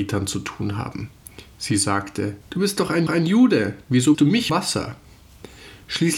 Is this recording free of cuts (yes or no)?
no